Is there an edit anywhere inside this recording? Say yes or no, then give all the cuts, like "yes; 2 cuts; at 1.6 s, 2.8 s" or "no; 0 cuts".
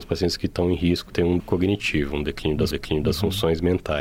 yes; 3 cuts; at 1.1 s, 1.4 s, 2.7 s